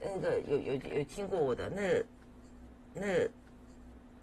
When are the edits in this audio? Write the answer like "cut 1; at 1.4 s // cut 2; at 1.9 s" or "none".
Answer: cut 1; at 2.9 s